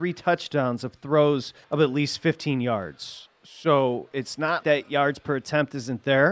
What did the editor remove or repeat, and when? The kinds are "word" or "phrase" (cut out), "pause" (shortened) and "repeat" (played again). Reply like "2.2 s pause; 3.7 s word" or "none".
1.6 s pause; 4.6 s word